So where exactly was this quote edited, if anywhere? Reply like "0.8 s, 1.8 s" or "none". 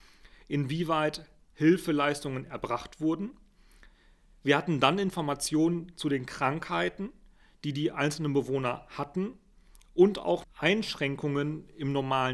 10.4 s